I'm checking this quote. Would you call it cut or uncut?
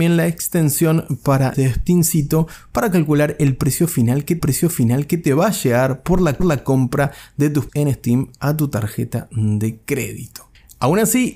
cut